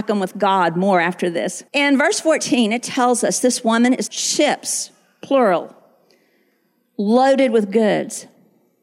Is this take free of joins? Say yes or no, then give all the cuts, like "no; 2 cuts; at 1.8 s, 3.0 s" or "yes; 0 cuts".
no; 2 cuts; at 1.7 s, 4.1 s